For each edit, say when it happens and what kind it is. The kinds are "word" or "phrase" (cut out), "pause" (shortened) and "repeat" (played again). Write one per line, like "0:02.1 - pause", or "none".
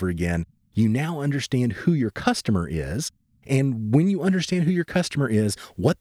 none